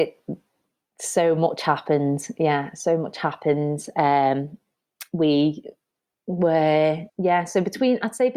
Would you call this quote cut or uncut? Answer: cut